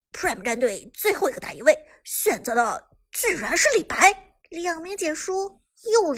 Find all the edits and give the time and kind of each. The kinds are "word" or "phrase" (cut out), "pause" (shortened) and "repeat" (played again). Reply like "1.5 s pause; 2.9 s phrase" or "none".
4.4 s pause